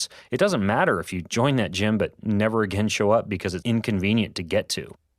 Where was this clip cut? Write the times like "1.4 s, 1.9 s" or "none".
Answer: 3.6 s